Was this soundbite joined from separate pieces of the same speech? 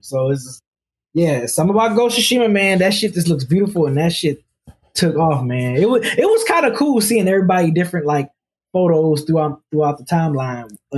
no; 0 cuts

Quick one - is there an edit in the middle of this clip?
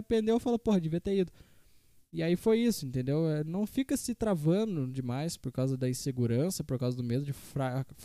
no; 0 cuts

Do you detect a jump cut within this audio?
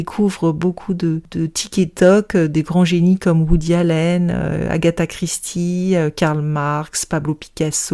no; 0 cuts

